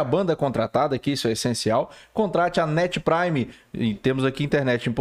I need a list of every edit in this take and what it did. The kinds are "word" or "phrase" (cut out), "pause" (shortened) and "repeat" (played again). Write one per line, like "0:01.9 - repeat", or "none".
none